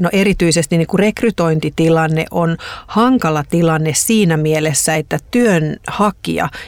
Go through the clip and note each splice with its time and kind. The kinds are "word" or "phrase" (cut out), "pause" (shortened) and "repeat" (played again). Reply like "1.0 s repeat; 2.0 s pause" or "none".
none